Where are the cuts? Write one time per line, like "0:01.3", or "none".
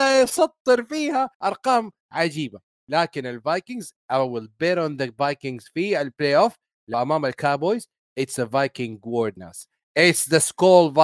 0:01.3
0:06.9
0:09.4